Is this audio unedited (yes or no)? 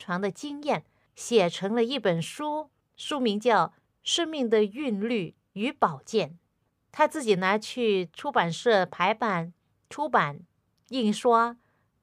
yes